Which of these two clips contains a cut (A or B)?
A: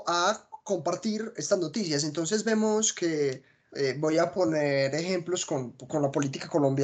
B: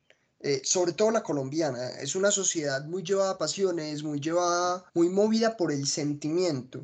B